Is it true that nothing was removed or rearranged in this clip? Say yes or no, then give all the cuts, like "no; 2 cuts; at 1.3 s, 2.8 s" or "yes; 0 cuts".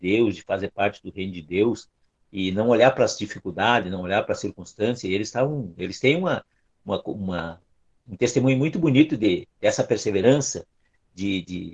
yes; 0 cuts